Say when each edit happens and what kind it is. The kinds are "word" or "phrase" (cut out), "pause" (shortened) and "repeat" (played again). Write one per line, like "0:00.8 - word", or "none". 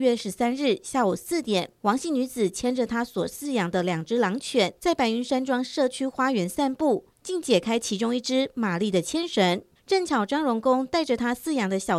0:01.8 - pause
0:04.8 - pause
0:07.1 - pause
0:09.8 - pause